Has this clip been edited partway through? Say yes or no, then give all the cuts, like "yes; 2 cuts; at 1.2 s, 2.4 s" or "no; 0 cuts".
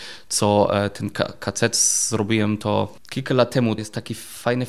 yes; 1 cut; at 3.8 s